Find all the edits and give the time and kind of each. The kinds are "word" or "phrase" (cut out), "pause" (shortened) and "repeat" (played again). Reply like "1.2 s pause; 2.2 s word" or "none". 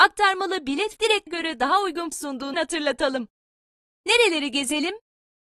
1.0 s word; 1.3 s word; 2.1 s word; 2.5 s word